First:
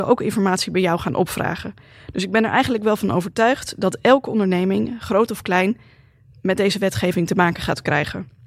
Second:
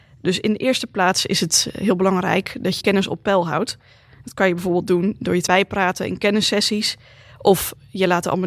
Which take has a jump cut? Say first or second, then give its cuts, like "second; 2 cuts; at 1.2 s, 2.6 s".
second; 2 cuts; at 2.8 s, 5.5 s